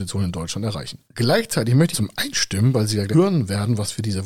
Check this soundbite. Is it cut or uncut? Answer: cut